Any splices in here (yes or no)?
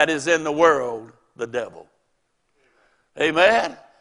no